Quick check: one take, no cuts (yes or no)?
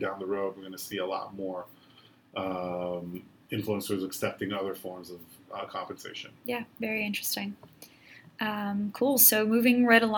yes